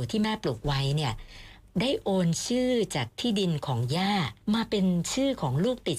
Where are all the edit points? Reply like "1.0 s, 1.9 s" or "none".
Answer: 4.4 s